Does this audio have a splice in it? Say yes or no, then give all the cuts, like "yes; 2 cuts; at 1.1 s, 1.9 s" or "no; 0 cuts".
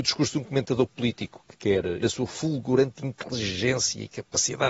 yes; 1 cut; at 2.0 s